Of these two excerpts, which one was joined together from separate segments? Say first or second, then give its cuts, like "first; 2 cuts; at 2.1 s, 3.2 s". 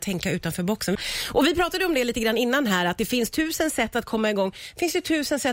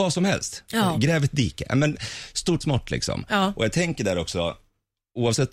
second; 1 cut; at 2.6 s